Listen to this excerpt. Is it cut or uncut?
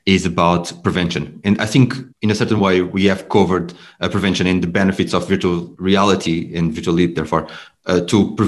uncut